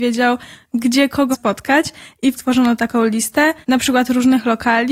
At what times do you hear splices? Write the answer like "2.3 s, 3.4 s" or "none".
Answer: 1.3 s, 2.3 s, 3.6 s